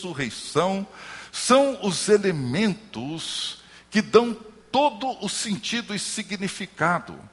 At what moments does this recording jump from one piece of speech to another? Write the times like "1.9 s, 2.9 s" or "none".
none